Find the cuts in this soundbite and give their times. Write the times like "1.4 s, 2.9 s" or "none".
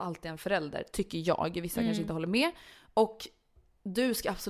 none

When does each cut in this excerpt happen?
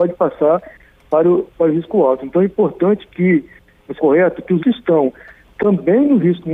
4.0 s, 4.6 s

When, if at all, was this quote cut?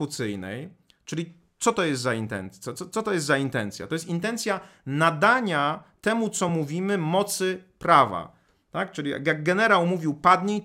none

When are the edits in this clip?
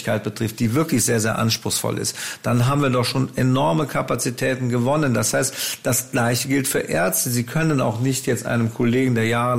none

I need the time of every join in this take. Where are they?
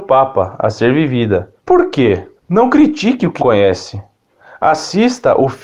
1.6 s, 2.4 s, 3.4 s

